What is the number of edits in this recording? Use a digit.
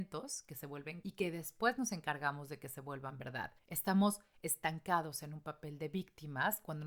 2